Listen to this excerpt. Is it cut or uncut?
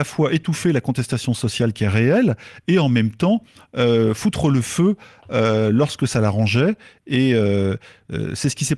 uncut